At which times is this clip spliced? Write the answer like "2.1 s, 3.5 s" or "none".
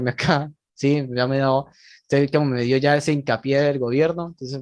none

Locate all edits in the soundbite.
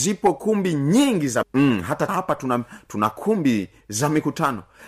1.4 s, 2.1 s, 3.8 s

